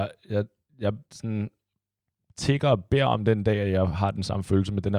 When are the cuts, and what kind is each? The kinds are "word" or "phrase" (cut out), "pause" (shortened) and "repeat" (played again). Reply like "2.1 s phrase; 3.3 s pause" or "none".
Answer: 1.0 s pause